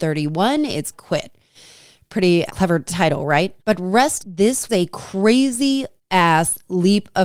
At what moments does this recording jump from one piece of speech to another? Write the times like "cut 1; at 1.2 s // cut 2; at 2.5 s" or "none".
cut 1; at 0.9 s // cut 2; at 2.5 s // cut 3; at 3.6 s // cut 4; at 4.2 s // cut 5; at 4.7 s // cut 6; at 6.0 s